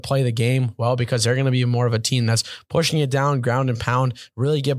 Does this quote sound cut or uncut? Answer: uncut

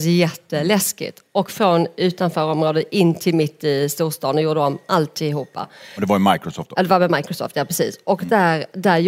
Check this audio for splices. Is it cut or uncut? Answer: uncut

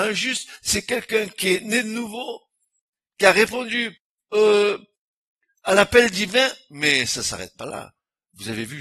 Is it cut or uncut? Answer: uncut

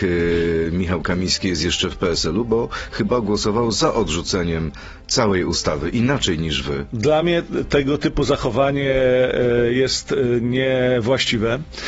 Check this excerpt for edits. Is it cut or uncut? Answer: uncut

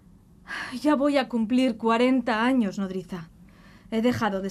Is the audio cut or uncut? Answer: uncut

